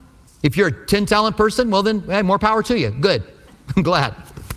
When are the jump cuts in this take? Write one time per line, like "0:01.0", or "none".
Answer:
none